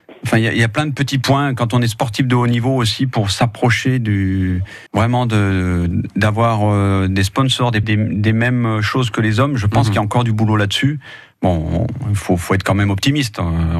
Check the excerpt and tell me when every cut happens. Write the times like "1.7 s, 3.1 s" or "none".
4.9 s, 7.8 s